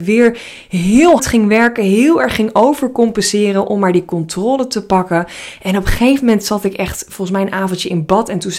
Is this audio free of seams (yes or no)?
no